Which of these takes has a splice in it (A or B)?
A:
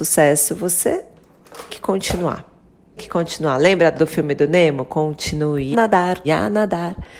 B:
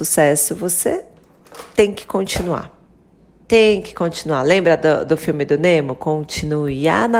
A